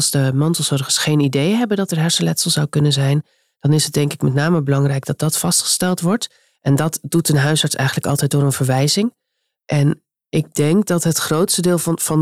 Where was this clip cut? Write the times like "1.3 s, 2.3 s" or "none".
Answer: none